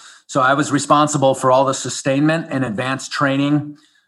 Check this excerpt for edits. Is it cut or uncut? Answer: uncut